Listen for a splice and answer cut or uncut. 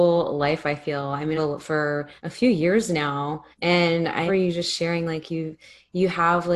cut